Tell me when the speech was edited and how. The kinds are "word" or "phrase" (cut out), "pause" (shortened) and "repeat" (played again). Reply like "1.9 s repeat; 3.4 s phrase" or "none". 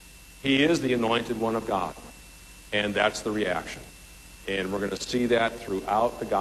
none